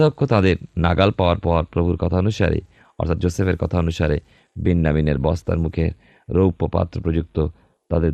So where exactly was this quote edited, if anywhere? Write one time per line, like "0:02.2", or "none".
none